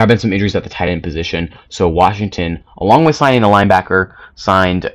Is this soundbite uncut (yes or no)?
yes